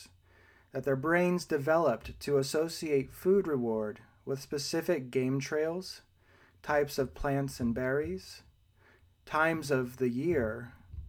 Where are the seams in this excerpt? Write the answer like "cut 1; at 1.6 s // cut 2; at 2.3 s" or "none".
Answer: none